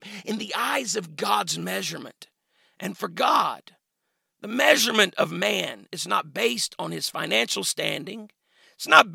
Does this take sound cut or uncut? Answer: uncut